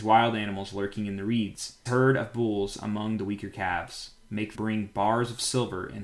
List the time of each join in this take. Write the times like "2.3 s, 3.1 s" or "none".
1.9 s, 4.5 s